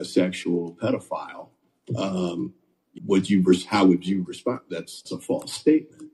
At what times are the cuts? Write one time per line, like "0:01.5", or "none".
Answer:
0:03.0
0:05.0